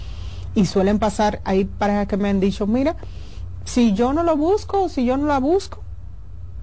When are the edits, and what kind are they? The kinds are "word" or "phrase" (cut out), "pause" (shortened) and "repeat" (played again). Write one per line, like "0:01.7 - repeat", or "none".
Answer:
0:01.4 - word